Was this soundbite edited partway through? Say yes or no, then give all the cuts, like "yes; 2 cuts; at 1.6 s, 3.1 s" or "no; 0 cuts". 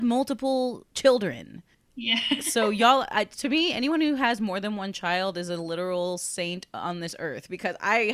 yes; 1 cut; at 1.7 s